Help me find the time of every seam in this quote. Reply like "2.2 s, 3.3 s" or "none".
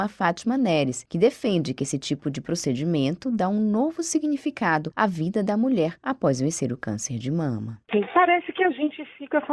none